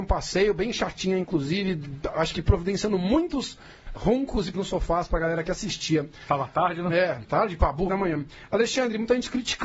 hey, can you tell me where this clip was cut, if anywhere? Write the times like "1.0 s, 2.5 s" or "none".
4.0 s, 4.5 s, 7.9 s